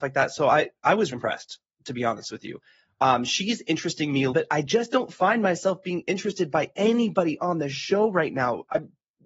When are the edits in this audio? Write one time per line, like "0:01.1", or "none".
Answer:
0:01.1
0:04.3